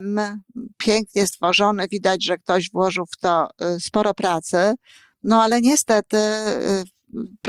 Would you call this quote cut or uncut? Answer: uncut